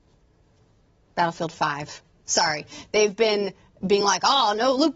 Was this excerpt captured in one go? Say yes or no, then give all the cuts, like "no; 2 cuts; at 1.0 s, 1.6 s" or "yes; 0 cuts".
yes; 0 cuts